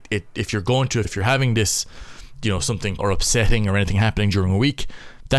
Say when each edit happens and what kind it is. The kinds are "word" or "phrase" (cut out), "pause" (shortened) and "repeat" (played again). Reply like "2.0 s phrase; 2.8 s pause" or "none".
1.0 s word; 3.0 s phrase